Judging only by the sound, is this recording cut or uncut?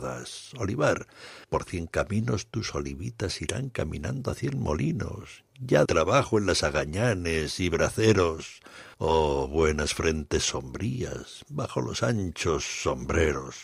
cut